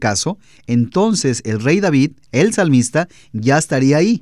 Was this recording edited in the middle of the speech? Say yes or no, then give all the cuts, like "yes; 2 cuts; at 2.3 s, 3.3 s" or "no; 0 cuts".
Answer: no; 0 cuts